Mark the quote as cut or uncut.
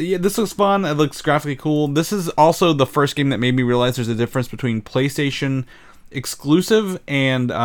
uncut